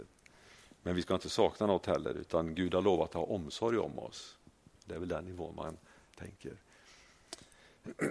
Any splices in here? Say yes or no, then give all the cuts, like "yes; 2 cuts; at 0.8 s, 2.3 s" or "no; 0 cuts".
no; 0 cuts